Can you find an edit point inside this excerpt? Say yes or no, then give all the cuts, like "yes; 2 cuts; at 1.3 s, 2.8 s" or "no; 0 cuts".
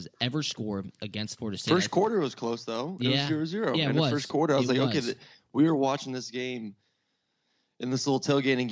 no; 0 cuts